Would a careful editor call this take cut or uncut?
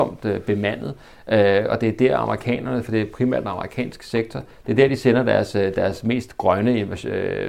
uncut